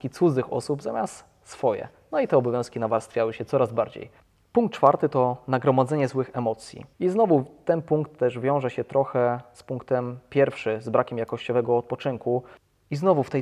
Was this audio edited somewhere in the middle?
yes; 2 cuts; at 4.2 s, 6.9 s

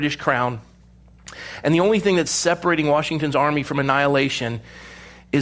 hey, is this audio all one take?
yes; 0 cuts

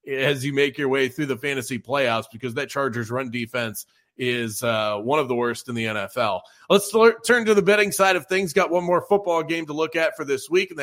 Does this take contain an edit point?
no; 0 cuts

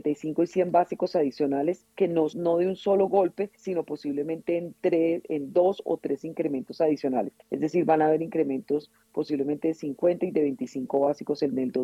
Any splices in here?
yes; 4 cuts; at 1.9 s, 2.3 s, 3.5 s, 7.4 s

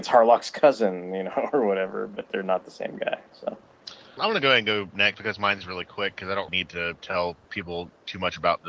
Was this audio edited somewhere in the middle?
yes; 3 cuts; at 4.2 s, 5.1 s, 6.5 s

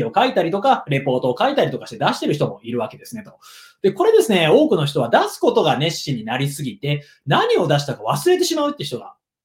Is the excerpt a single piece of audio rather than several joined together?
yes; 0 cuts

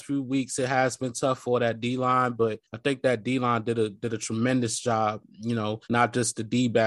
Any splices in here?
yes; 2 cuts; at 2.6 s, 5.8 s

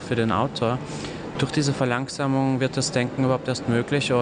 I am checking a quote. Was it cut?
no; 0 cuts

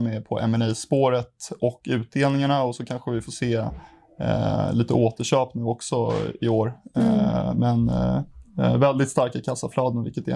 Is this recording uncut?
yes; 0 cuts

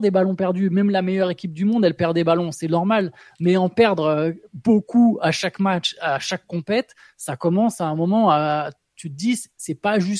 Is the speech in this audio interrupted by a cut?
no; 0 cuts

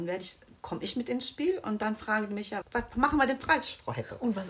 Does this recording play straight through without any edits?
no; 1 cut; at 2.6 s

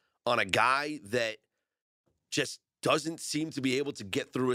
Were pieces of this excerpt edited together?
no; 0 cuts

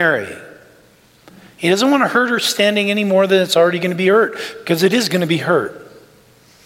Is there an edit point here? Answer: no; 0 cuts

